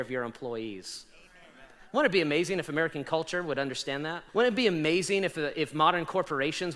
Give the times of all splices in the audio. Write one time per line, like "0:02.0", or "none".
0:04.3